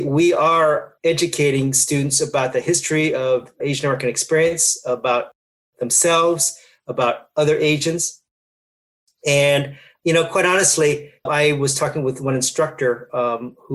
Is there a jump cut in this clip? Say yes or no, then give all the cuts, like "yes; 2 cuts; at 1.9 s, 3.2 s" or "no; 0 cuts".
yes; 3 cuts; at 1.0 s, 3.6 s, 11.3 s